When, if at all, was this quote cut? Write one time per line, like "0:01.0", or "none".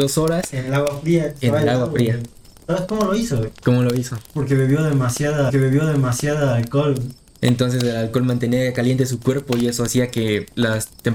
0:04.3
0:05.5